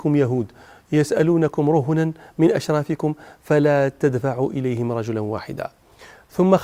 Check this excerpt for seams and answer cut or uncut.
uncut